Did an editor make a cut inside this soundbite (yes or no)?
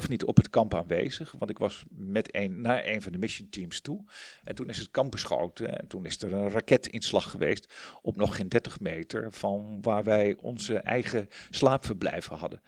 no